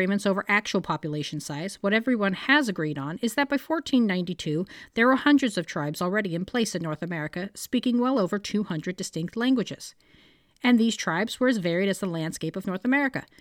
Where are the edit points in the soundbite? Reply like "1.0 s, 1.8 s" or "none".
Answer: none